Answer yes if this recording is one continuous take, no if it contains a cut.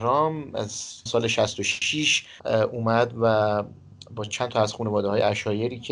no